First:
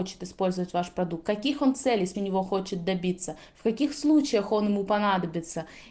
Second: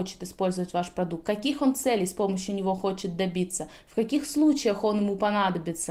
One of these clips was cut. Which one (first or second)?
first